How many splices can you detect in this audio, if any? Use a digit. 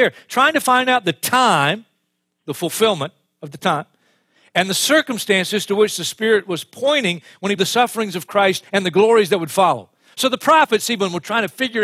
1